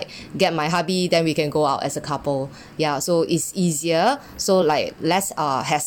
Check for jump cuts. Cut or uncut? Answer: uncut